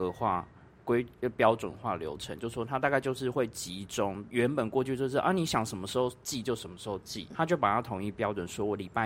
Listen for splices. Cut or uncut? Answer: cut